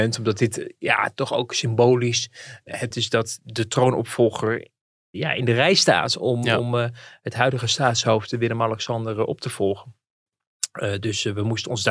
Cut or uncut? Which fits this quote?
cut